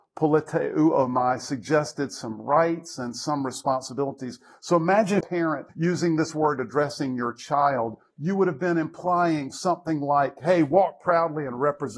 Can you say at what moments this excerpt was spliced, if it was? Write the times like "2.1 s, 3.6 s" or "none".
5.2 s, 5.7 s